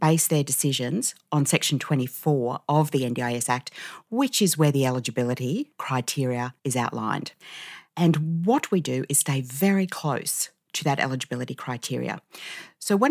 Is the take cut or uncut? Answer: cut